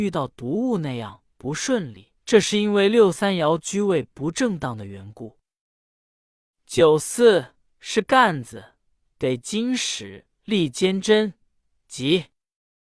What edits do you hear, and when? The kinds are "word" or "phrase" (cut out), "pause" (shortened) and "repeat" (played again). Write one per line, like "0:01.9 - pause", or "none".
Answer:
0:02.2 - pause
0:07.7 - pause
0:10.4 - pause